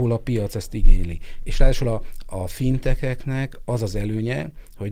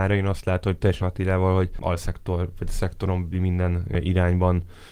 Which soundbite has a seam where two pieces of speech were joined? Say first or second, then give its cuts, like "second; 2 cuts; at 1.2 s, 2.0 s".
second; 3 cuts; at 1.0 s, 1.8 s, 3.3 s